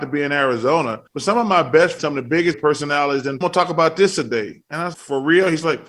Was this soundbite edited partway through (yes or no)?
yes